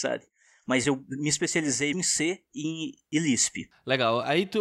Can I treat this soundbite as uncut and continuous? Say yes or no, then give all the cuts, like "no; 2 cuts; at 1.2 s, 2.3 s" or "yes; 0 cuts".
no; 1 cut; at 1.9 s